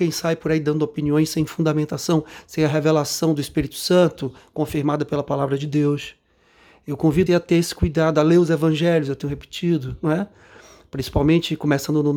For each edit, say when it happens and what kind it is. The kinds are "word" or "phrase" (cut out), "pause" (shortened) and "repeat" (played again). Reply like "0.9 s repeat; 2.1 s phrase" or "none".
7.3 s word